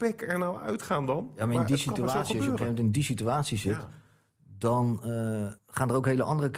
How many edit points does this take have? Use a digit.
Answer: 1